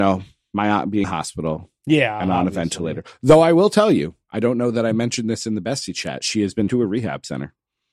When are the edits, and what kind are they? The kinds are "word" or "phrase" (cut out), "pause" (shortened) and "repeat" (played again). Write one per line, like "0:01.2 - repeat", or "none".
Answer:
0:01.0 - word
0:06.7 - word